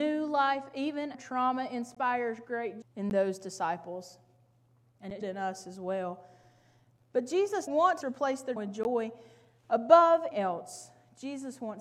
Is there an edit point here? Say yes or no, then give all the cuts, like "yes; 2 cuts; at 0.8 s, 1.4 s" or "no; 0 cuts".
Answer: yes; 7 cuts; at 1.1 s, 2.8 s, 5.2 s, 7.7 s, 8.0 s, 8.6 s, 10.3 s